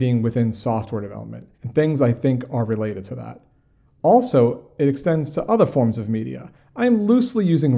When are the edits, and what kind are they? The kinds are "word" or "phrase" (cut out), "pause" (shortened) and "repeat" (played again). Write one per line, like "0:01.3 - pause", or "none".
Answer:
0:01.5 - pause